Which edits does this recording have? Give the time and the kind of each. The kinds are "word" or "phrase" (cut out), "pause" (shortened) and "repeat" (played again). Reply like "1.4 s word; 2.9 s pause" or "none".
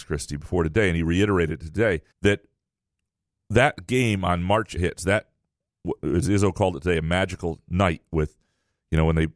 2.1 s pause; 4.8 s phrase